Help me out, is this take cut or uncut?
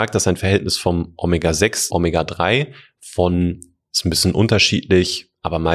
cut